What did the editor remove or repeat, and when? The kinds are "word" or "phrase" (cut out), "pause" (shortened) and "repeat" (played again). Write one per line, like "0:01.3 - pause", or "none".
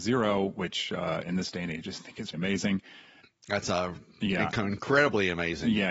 0:02.3 - word